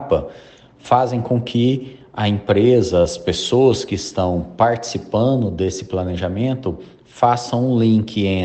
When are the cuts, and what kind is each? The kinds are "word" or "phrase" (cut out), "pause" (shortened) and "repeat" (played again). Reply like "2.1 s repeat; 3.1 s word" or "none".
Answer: none